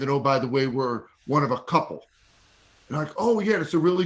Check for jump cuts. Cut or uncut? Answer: uncut